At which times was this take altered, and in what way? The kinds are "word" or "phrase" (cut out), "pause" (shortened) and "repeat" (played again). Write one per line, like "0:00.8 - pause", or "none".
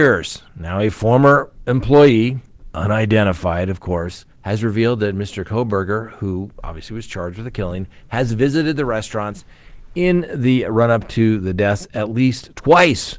0:04.3 - pause